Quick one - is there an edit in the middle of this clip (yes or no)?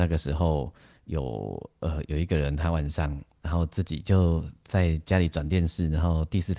no